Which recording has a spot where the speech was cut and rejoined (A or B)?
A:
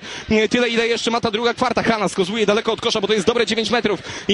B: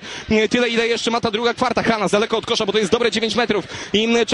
B